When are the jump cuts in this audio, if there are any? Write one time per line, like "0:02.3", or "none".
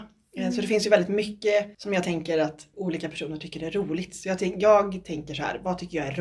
0:01.7
0:02.7